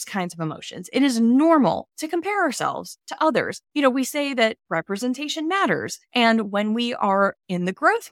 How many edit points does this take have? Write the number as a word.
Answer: two